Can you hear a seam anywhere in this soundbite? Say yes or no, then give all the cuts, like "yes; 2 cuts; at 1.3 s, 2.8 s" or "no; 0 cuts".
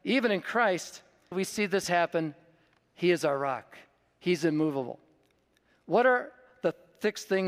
yes; 1 cut; at 1.3 s